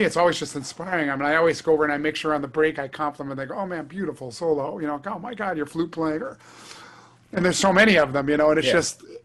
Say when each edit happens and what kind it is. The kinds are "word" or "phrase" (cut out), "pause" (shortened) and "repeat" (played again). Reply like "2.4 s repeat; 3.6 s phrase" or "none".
none